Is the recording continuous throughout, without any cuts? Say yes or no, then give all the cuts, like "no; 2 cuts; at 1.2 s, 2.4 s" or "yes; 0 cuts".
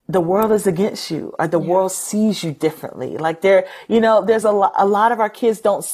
yes; 0 cuts